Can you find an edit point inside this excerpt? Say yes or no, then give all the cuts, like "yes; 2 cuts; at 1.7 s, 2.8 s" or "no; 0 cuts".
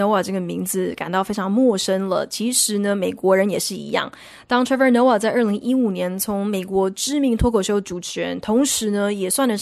no; 0 cuts